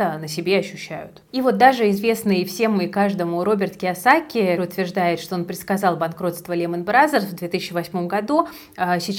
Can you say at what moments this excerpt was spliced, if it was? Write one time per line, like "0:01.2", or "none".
0:01.3
0:04.6